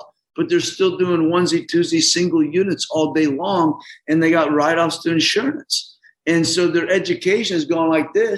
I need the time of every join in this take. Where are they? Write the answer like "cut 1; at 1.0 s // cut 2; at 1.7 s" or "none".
none